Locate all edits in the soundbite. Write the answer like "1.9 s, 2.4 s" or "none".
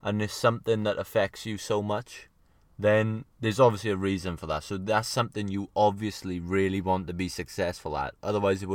none